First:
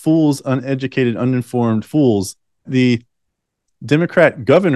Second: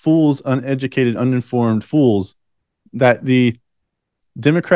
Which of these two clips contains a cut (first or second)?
first